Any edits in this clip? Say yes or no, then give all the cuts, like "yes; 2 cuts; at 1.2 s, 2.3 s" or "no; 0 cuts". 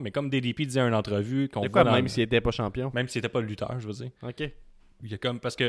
no; 0 cuts